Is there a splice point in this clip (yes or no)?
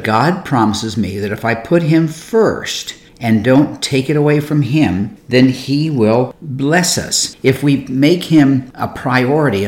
no